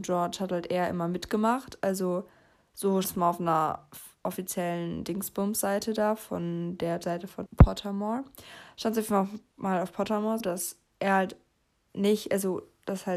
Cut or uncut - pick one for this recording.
cut